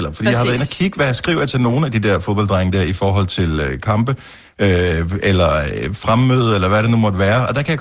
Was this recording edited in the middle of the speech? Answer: no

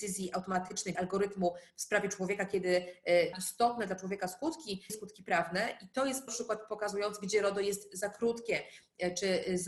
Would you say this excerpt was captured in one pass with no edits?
no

